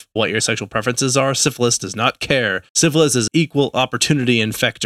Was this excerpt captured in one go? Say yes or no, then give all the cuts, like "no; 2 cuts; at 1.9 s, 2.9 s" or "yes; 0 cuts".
no; 2 cuts; at 2.7 s, 3.3 s